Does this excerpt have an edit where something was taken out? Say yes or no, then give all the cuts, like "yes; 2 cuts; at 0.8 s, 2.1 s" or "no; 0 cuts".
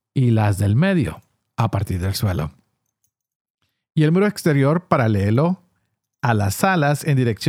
no; 0 cuts